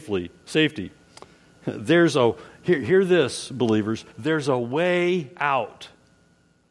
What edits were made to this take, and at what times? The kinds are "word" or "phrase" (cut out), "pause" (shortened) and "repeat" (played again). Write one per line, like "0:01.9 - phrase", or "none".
0:04.1 - pause